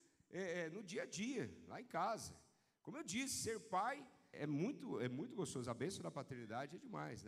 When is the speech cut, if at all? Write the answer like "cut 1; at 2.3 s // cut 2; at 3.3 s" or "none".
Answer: cut 1; at 4.3 s